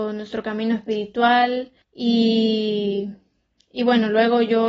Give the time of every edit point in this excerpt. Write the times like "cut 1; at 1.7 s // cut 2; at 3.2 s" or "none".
cut 1; at 1.8 s

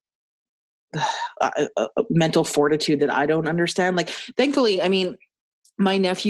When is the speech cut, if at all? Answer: none

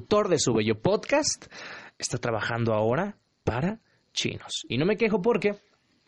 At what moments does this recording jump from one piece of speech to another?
none

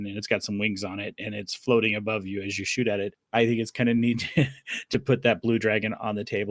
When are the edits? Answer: none

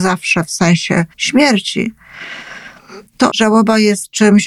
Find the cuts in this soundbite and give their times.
cut 1; at 1.1 s // cut 2; at 3.3 s

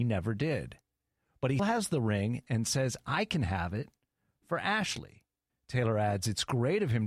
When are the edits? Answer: cut 1; at 1.6 s // cut 2; at 5.5 s

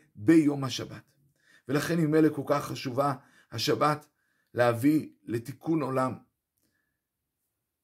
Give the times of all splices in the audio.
none

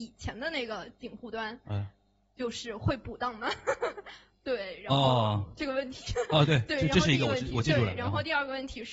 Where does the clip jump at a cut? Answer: none

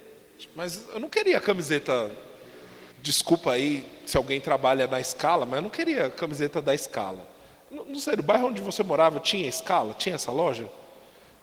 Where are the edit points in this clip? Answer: cut 1; at 2.9 s

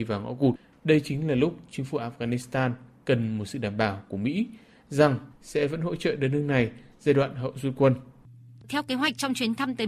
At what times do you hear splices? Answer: none

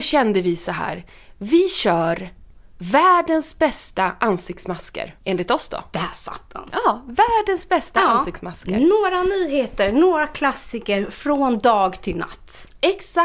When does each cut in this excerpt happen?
cut 1; at 5.2 s

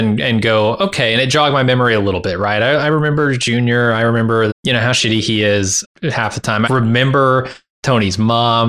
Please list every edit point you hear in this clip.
cut 1; at 4.5 s // cut 2; at 5.8 s // cut 3; at 6.7 s

